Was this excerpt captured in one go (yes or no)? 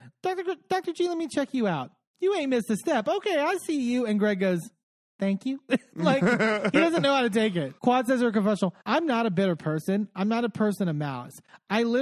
no